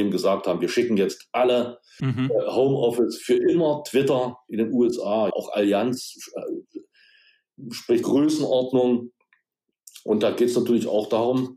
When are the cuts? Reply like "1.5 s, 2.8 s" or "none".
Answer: 2.0 s, 5.3 s, 8.0 s

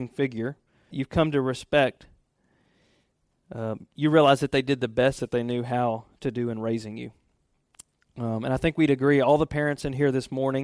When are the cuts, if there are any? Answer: 0.9 s

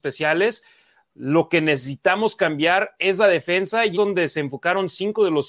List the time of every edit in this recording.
3.9 s

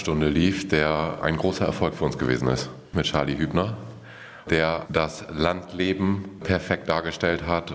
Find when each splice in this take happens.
none

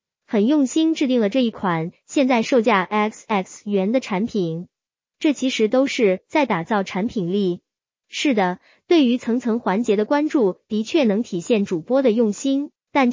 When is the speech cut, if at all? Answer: none

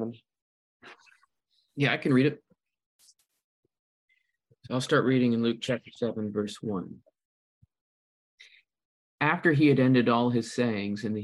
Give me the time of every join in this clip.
none

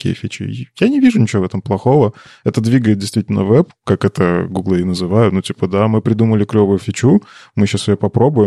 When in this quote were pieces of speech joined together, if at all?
none

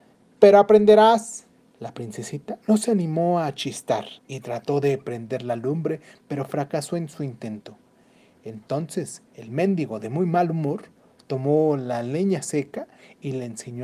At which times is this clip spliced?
1.5 s, 2.6 s, 4.2 s, 9.3 s

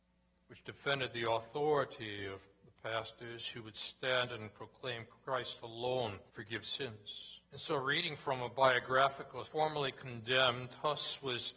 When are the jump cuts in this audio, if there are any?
6.3 s, 7.4 s, 9.4 s

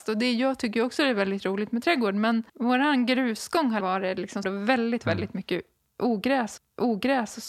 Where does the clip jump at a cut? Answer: 2.5 s, 3.8 s, 4.4 s, 6.6 s

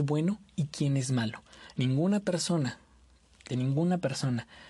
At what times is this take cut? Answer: 3.5 s

